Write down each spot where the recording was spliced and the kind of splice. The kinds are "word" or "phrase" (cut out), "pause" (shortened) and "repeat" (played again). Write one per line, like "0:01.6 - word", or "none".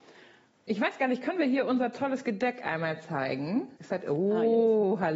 0:03.8 - pause